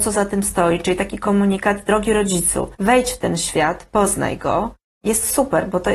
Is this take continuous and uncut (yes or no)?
no